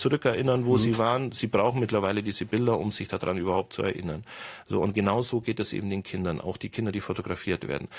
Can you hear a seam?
no; 0 cuts

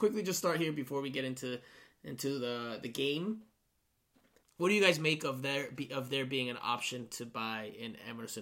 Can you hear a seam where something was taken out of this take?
no; 0 cuts

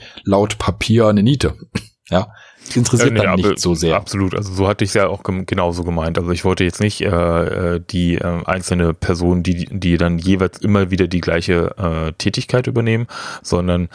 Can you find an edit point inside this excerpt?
no; 0 cuts

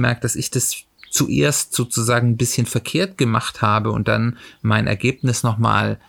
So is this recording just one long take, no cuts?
yes; 0 cuts

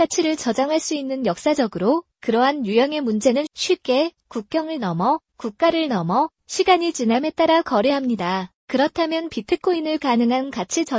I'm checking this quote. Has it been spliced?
yes; 2 cuts; at 3.5 s, 8.6 s

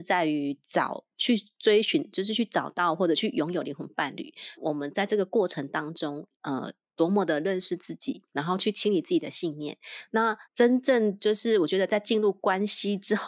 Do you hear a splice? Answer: yes; 4 cuts; at 4.5 s, 6.3 s, 8.3 s, 10.4 s

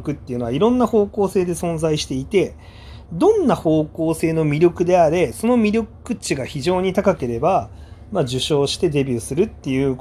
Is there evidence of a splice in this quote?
yes; 1 cut; at 3.1 s

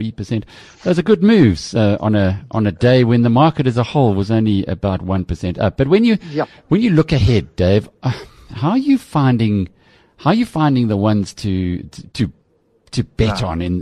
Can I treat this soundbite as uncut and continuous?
yes; 0 cuts

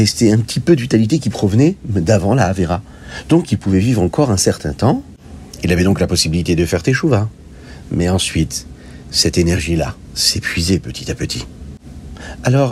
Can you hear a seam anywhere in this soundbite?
no; 0 cuts

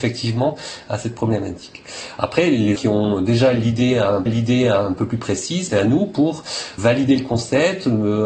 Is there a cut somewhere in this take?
yes; 4 cuts; at 2.8 s, 4.3 s, 5.7 s, 6.8 s

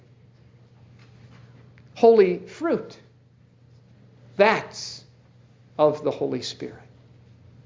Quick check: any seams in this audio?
no; 0 cuts

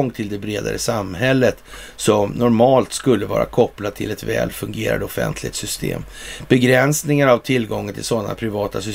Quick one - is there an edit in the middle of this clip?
no; 0 cuts

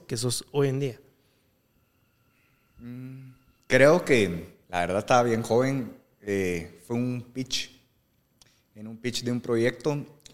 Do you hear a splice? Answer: yes; 1 cut; at 4.6 s

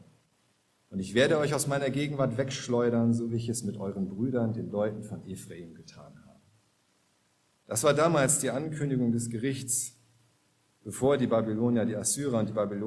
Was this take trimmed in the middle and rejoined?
no; 0 cuts

